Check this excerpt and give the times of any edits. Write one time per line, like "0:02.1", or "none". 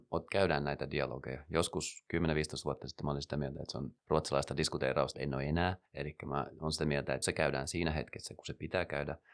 0:04.0
0:05.1
0:07.2